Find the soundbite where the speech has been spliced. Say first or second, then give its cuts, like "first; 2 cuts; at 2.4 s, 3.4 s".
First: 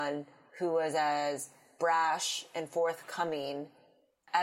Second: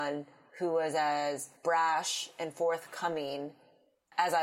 second; 1 cut; at 1.6 s